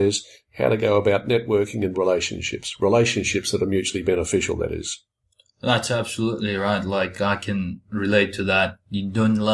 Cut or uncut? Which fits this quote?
cut